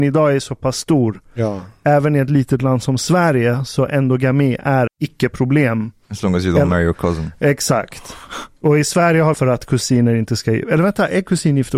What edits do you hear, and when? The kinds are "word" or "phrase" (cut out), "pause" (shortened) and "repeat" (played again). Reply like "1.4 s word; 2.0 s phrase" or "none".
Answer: 4.9 s word; 9.3 s phrase